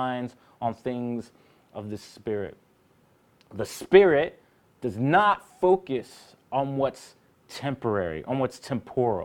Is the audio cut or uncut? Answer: uncut